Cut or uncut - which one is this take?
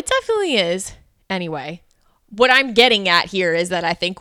uncut